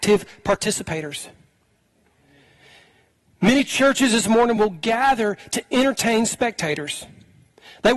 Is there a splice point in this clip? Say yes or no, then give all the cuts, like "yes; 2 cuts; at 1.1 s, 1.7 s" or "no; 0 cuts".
no; 0 cuts